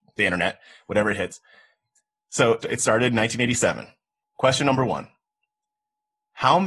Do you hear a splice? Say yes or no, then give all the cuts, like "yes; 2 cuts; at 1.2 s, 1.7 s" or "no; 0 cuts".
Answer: yes; 1 cut; at 2.6 s